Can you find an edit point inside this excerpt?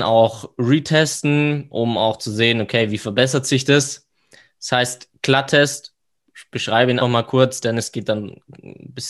yes; 1 cut; at 7.0 s

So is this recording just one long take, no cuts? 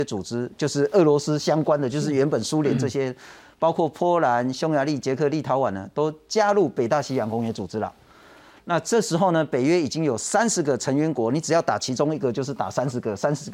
yes; 0 cuts

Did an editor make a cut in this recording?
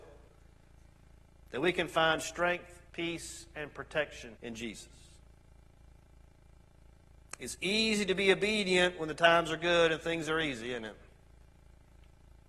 yes; 2 cuts; at 2.9 s, 4.4 s

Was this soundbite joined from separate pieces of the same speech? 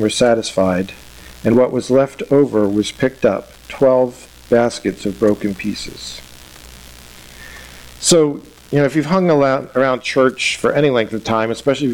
no; 0 cuts

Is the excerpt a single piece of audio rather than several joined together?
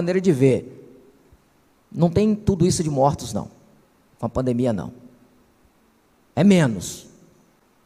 yes; 0 cuts

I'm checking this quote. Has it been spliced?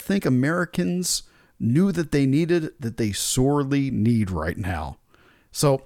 no; 0 cuts

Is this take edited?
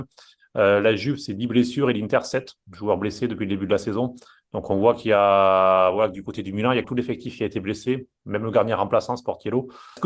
yes; 1 cut; at 6.8 s

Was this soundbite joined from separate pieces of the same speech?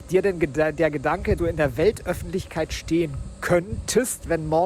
yes; 1 cut; at 1.4 s

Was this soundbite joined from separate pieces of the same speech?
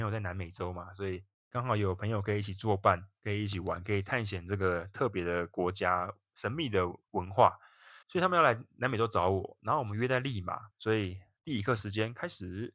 yes; 4 cuts; at 7.0 s, 8.0 s, 10.7 s, 11.4 s

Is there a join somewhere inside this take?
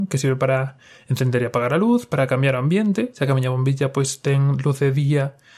no; 0 cuts

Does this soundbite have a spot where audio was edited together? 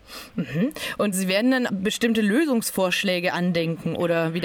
yes; 2 cuts; at 1.1 s, 1.7 s

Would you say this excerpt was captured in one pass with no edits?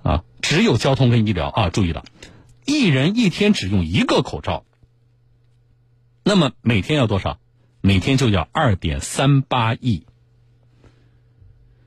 yes; 0 cuts

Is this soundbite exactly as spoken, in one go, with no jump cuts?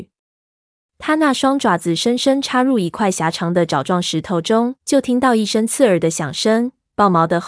no; 1 cut; at 4.8 s

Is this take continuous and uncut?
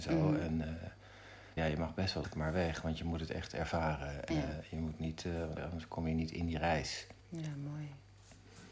no; 5 cuts; at 1.6 s, 2.2 s, 4.3 s, 5.6 s, 7.2 s

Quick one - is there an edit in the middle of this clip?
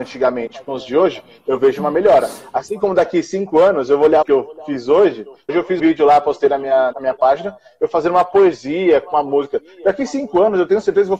yes; 4 cuts; at 4.2 s, 5.5 s, 5.8 s, 6.9 s

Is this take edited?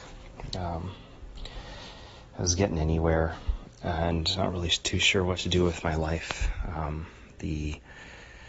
no; 0 cuts

